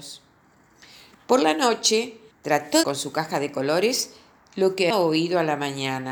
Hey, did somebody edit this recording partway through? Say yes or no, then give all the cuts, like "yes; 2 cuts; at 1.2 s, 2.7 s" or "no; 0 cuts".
yes; 3 cuts; at 2.3 s, 2.8 s, 4.9 s